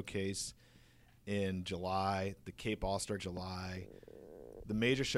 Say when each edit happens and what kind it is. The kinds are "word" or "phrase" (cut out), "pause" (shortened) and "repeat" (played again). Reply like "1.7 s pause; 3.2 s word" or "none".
3.2 s word